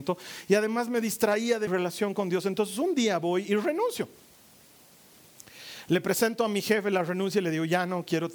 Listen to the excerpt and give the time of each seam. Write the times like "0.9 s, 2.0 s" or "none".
1.7 s